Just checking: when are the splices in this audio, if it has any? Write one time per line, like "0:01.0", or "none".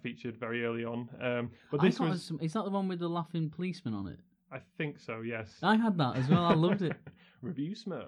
none